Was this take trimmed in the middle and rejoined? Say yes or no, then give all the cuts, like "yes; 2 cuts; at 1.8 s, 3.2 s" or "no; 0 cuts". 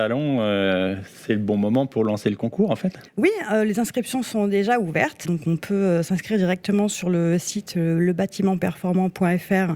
yes; 2 cuts; at 3.1 s, 5.2 s